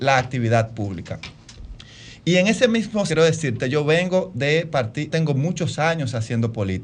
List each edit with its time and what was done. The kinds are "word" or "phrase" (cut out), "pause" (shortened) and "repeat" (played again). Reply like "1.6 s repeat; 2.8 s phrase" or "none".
3.1 s word; 5.1 s word